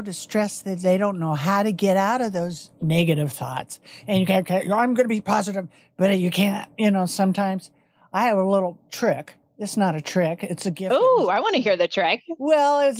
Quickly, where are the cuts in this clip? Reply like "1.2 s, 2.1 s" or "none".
none